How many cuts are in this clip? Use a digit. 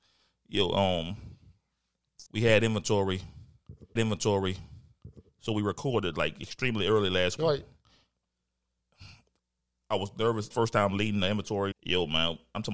5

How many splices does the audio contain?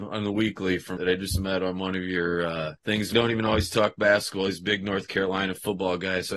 3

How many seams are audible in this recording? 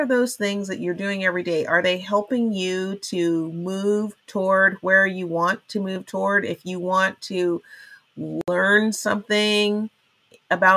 1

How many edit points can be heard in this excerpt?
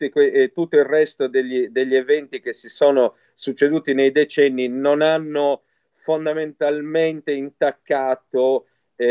0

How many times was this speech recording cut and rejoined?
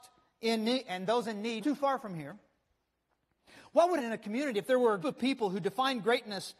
3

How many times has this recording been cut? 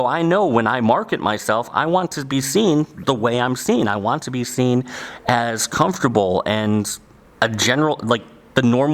0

